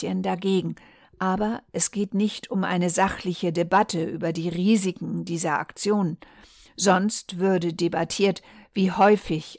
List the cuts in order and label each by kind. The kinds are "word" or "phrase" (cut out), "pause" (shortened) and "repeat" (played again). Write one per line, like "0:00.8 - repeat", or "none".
none

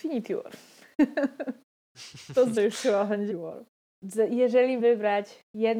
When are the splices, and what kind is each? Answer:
0:02.6 - word
0:03.3 - word
0:04.8 - word

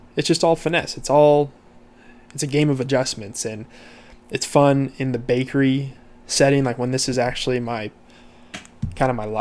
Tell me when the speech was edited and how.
none

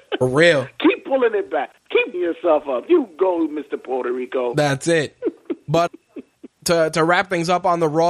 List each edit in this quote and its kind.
0:02.1 - word
0:05.9 - word

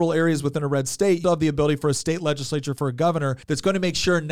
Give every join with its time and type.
0:01.2 - word
0:03.4 - pause

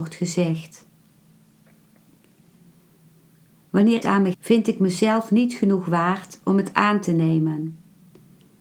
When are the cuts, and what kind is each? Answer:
0:04.0 - phrase
0:04.3 - word

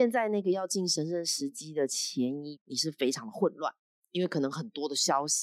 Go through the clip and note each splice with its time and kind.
0:02.6 - word

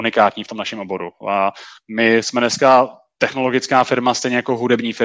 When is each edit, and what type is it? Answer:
none

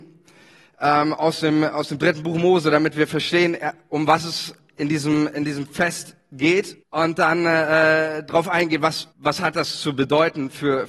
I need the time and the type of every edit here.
0:06.8 - pause
0:09.1 - pause

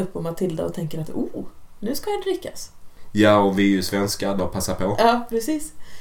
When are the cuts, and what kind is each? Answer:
0:04.4 - word

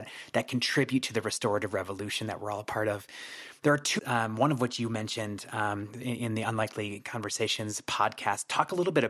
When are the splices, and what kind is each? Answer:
0:04.0 - word

